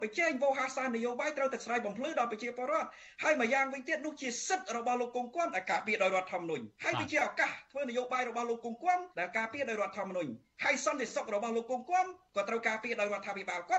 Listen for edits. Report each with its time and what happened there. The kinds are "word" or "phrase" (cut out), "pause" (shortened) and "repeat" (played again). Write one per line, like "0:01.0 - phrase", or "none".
0:06.7 - pause
0:09.1 - pause